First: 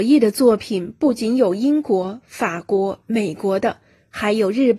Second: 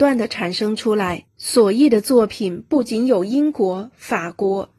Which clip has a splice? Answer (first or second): second